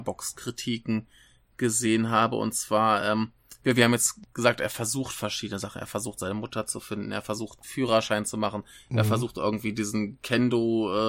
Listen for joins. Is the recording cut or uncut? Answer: uncut